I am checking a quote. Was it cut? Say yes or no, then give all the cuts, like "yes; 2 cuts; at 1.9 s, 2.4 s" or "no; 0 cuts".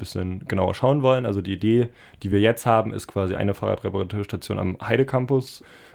no; 0 cuts